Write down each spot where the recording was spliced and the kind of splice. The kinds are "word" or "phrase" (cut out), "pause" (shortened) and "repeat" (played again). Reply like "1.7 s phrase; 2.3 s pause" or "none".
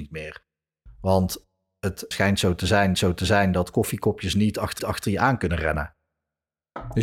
2.1 s word; 2.9 s repeat; 4.8 s repeat